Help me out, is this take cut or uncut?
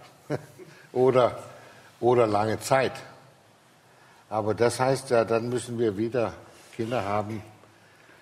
uncut